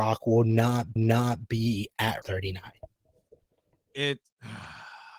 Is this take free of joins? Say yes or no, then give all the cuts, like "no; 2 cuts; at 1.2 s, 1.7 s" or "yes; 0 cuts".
no; 2 cuts; at 1.0 s, 2.2 s